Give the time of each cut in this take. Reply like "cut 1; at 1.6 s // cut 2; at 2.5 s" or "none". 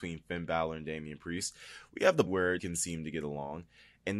cut 1; at 2.3 s // cut 2; at 2.6 s